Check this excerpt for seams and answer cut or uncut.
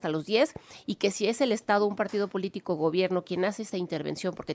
uncut